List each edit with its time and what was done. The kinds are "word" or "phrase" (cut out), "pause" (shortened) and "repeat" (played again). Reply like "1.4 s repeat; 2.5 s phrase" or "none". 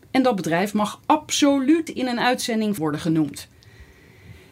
1.9 s word; 2.8 s phrase